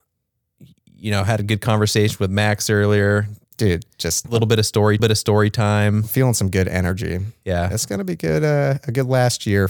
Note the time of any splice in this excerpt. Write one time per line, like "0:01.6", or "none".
0:04.2
0:05.0